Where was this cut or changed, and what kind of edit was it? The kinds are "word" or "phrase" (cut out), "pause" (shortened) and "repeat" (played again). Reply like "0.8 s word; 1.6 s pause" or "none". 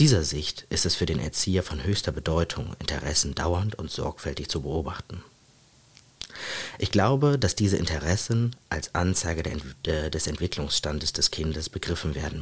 none

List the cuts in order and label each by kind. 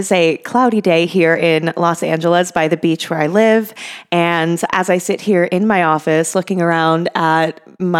4.7 s word

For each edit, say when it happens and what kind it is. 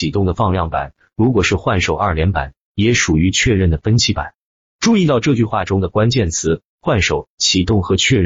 none

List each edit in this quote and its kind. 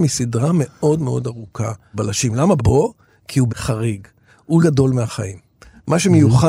1.9 s word; 2.6 s word; 3.5 s word; 4.6 s word

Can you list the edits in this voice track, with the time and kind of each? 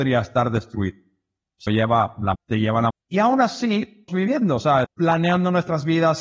1.7 s word; 2.3 s word; 2.9 s word; 4.1 s word; 4.8 s word

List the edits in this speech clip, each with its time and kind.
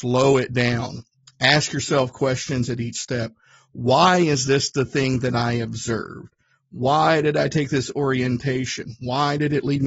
none

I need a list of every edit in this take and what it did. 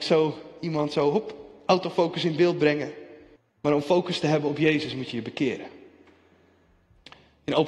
3.4 s pause

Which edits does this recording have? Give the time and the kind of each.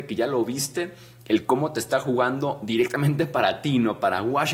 none

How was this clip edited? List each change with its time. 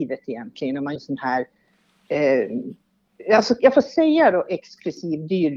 1.0 s word

